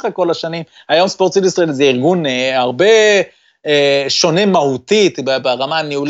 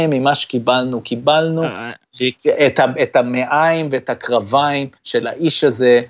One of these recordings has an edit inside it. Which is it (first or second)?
second